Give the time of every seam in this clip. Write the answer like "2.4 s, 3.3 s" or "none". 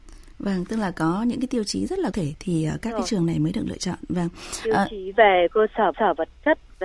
2.1 s, 5.9 s